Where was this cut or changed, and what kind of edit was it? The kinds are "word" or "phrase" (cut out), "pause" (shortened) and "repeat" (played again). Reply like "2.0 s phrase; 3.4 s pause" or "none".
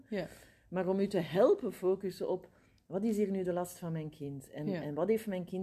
none

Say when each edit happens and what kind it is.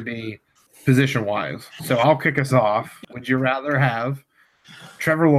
3.1 s word

